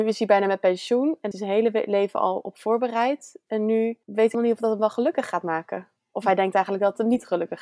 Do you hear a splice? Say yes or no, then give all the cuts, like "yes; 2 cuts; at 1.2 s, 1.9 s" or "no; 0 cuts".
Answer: yes; 3 cuts; at 1.3 s, 4.0 s, 4.3 s